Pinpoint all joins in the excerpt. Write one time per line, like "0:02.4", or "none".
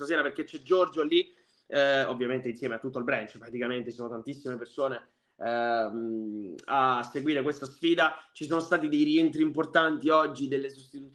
none